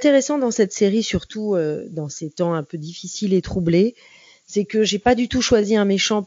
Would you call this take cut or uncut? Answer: uncut